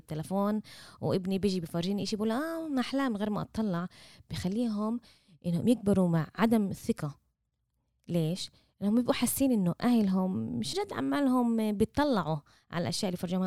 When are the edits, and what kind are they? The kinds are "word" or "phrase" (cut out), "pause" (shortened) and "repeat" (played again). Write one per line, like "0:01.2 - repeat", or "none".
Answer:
0:10.7 - word